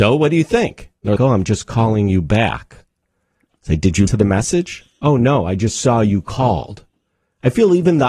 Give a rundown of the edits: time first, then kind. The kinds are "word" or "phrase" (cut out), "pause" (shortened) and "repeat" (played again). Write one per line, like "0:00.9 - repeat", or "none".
0:01.2 - word
0:04.1 - word